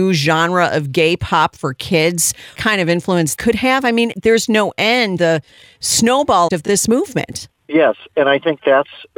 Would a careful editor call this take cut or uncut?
cut